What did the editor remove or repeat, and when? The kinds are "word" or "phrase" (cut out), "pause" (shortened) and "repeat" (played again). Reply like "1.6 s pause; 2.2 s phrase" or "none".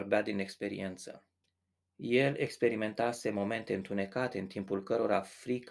1.4 s pause